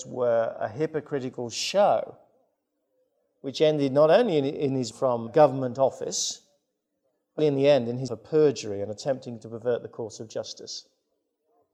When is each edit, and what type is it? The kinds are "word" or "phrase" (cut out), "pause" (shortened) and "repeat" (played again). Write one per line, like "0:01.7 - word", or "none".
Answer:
0:04.9 - word
0:05.3 - word
0:07.4 - word
0:08.1 - word